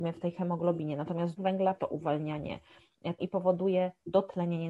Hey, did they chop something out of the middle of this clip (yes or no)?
yes